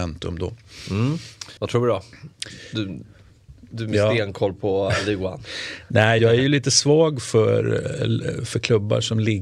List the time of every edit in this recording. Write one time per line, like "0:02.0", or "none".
0:01.6
0:06.2

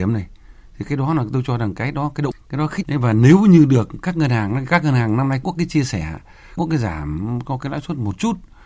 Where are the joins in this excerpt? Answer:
0:02.3
0:02.8
0:05.4
0:06.6

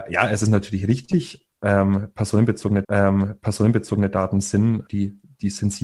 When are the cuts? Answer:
0:02.8
0:04.9

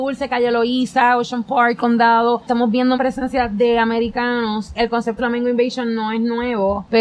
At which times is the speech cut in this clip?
0:02.9
0:04.7
0:05.2

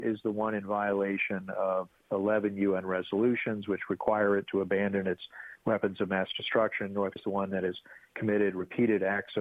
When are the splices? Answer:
0:07.2

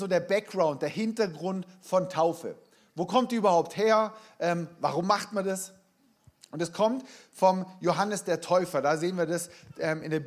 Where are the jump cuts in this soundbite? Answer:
none

